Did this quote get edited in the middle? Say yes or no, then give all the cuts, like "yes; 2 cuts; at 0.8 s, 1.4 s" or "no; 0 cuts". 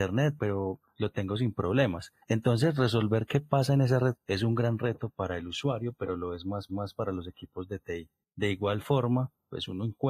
yes; 4 cuts; at 2.2 s, 4.2 s, 6.7 s, 8.2 s